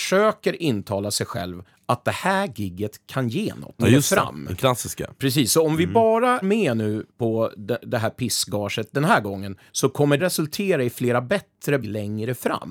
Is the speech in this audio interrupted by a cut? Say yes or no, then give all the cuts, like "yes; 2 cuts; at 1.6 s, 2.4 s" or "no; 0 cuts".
yes; 7 cuts; at 1.7 s, 3.8 s, 6.4 s, 7.1 s, 9.7 s, 10.2 s, 11.8 s